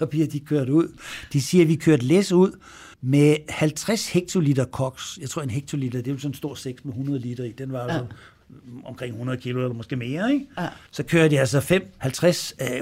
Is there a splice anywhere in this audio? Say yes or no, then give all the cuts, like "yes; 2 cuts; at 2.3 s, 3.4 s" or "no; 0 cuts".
yes; 2 cuts; at 2.9 s, 10.9 s